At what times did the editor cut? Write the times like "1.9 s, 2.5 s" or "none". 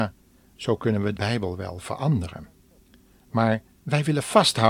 1.2 s